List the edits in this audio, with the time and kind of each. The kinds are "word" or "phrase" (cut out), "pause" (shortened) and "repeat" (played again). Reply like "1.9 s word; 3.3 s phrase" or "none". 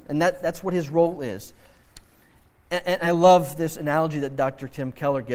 none